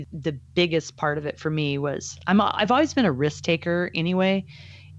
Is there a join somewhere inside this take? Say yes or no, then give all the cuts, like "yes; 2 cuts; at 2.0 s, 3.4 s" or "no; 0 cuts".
no; 0 cuts